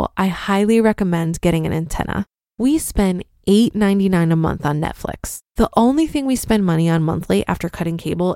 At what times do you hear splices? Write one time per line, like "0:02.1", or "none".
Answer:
0:02.3
0:05.5